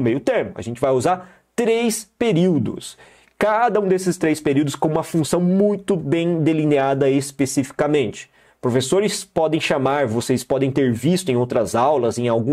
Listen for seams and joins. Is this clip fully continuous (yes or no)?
yes